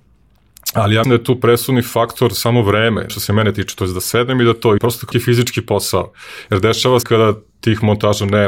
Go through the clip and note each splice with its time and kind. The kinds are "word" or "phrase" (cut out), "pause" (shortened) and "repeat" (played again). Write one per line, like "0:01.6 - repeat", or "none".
0:01.0 - word
0:03.1 - word
0:04.8 - word
0:05.1 - word
0:07.0 - word